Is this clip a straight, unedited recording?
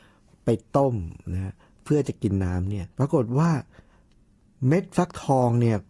no; 1 cut; at 2.9 s

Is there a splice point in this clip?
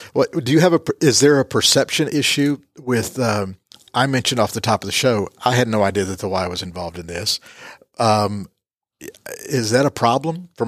no; 0 cuts

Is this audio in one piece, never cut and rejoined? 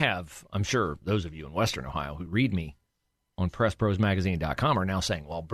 yes; 0 cuts

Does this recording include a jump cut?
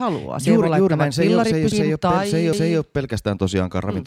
yes; 2 cuts; at 1.7 s, 2.5 s

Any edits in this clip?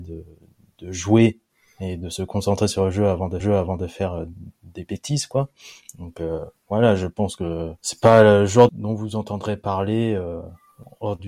yes; 3 cuts; at 3.4 s, 7.8 s, 8.7 s

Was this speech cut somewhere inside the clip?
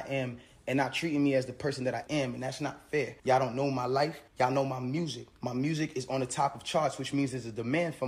yes; 4 cuts; at 2.1 s, 3.2 s, 4.3 s, 5.3 s

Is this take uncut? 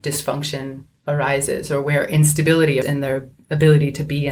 no; 1 cut; at 2.8 s

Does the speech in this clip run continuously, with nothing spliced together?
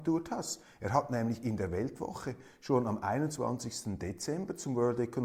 yes; 0 cuts

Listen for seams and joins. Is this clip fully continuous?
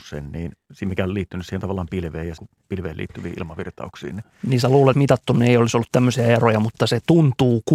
no; 2 cuts; at 2.4 s, 4.9 s

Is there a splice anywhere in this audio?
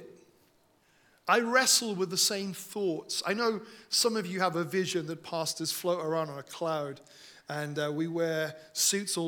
no; 0 cuts

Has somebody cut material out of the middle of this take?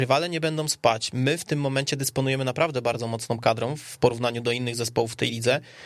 no; 0 cuts

